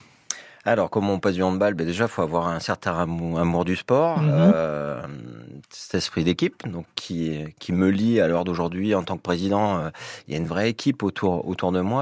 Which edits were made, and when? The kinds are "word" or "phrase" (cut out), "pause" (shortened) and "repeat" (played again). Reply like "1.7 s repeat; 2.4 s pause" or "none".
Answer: none